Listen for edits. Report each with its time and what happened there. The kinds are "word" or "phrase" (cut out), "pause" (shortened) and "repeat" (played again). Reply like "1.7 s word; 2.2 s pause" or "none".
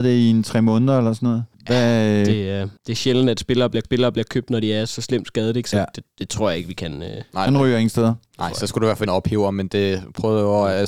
1.5 s pause; 2.8 s pause; 3.8 s repeat; 4.9 s word; 7.5 s phrase; 9.1 s word